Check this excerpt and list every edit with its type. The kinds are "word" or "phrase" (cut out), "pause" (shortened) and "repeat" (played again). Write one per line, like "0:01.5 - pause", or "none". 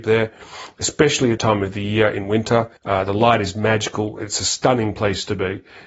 0:01.4 - word
0:02.8 - pause